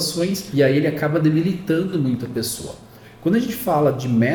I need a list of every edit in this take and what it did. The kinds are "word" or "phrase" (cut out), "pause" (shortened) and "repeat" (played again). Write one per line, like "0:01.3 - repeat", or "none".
none